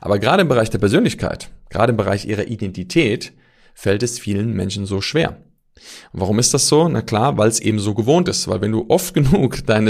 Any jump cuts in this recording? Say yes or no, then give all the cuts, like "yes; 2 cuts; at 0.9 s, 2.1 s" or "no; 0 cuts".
no; 0 cuts